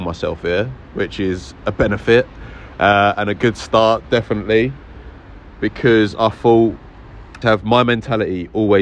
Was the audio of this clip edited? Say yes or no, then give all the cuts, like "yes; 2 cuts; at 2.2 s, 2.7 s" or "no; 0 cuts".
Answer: yes; 1 cut; at 7.4 s